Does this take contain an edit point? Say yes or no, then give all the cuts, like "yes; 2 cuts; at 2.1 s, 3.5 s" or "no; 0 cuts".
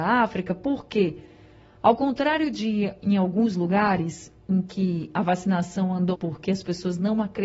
yes; 1 cut; at 6.1 s